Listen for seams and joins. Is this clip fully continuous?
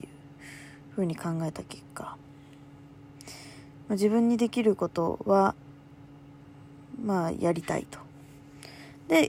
yes; 0 cuts

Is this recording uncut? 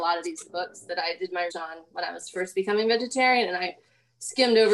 no; 1 cut; at 1.5 s

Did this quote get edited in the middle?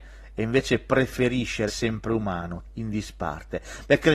yes; 2 cuts; at 1.7 s, 2.7 s

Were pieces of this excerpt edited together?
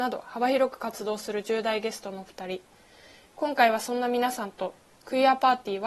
no; 0 cuts

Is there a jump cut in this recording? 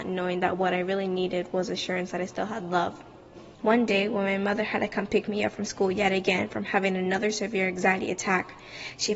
yes; 1 cut; at 3.5 s

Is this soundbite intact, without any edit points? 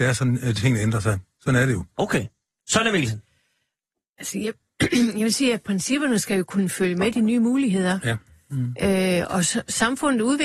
yes; 0 cuts

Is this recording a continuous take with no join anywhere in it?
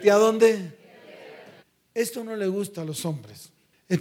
no; 1 cut; at 1.6 s

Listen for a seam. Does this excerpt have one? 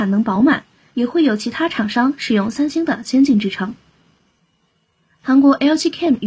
no; 0 cuts

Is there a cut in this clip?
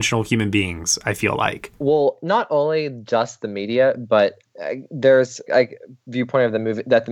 yes; 3 cuts; at 1.8 s, 4.5 s, 5.5 s

